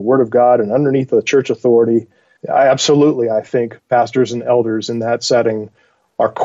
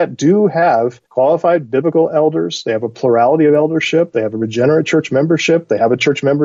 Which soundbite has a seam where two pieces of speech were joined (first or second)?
second